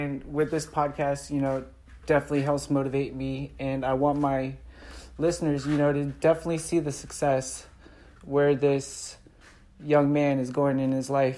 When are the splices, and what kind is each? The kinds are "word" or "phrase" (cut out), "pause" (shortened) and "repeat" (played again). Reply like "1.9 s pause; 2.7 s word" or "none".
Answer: none